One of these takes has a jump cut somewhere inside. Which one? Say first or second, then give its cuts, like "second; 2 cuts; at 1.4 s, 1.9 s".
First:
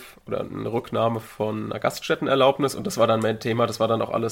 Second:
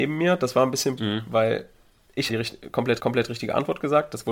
second; 3 cuts; at 1.0 s, 2.3 s, 3.0 s